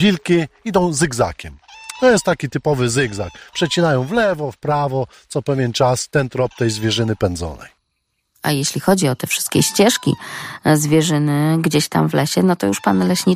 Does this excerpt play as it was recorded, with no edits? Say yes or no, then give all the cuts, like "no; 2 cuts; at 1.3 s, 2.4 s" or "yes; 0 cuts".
yes; 0 cuts